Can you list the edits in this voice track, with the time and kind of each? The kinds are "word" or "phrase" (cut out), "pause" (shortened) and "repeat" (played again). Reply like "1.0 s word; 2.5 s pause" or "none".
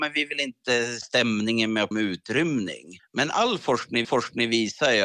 1.0 s word; 1.9 s phrase; 3.0 s pause; 4.0 s repeat